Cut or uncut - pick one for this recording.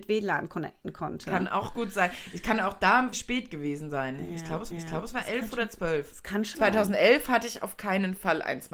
cut